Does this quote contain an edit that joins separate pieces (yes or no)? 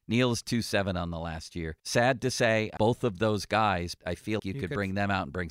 yes